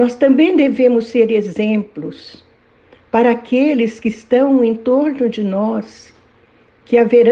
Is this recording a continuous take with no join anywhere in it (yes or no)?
yes